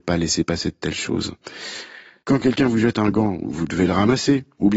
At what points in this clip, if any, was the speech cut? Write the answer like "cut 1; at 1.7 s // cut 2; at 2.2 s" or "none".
none